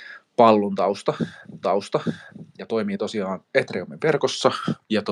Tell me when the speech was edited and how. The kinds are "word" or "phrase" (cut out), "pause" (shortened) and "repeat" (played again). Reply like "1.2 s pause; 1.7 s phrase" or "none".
1.6 s repeat; 3.4 s pause